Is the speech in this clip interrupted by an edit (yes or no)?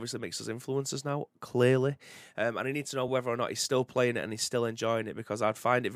no